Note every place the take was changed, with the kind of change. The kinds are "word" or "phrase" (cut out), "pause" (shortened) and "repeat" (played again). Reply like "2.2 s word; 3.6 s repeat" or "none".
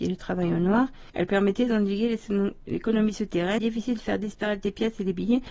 1.1 s pause; 3.6 s word